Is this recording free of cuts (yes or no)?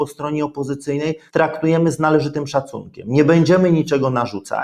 no